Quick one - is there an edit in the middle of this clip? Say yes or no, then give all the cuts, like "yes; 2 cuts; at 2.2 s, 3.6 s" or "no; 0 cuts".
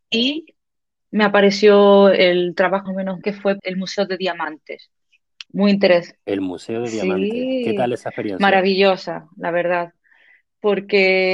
yes; 4 cuts; at 2.9 s, 3.2 s, 3.6 s, 5.5 s